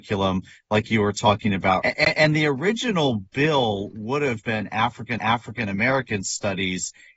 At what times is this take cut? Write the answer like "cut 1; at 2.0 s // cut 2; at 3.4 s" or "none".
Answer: cut 1; at 1.8 s // cut 2; at 4.4 s // cut 3; at 5.2 s